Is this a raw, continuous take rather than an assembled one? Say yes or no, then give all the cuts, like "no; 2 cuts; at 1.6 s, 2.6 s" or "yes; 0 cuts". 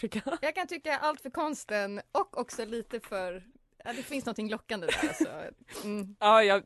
yes; 0 cuts